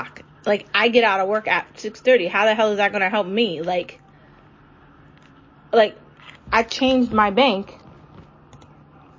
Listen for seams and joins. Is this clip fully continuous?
yes; 0 cuts

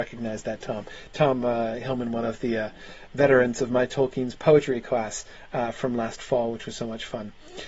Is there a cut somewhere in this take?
no; 0 cuts

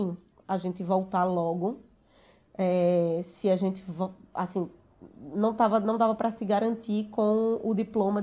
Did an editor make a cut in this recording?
no; 0 cuts

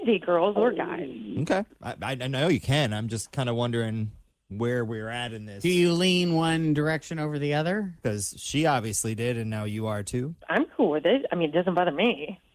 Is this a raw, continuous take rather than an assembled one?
yes; 0 cuts

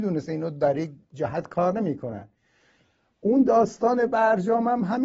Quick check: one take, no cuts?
yes; 0 cuts

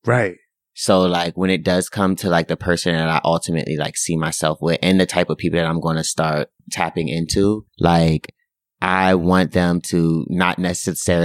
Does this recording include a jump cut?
yes; 2 cuts; at 6.6 s, 7.7 s

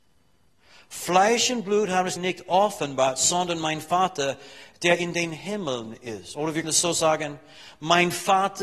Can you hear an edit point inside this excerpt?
yes; 2 cuts; at 2.2 s, 6.6 s

